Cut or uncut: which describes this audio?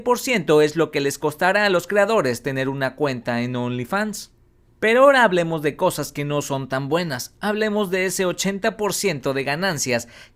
uncut